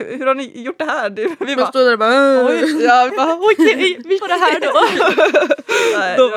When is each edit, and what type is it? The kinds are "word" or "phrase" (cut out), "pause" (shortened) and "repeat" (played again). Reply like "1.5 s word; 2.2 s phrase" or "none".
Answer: 3.1 s word; 4.2 s word